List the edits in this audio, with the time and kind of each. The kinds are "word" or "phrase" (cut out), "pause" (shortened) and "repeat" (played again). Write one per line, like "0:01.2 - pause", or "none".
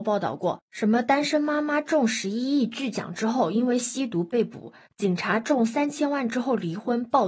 none